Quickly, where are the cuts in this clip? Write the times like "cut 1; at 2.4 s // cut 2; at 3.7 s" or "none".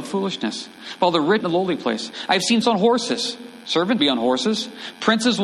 cut 1; at 1.4 s // cut 2; at 2.6 s // cut 3; at 4.0 s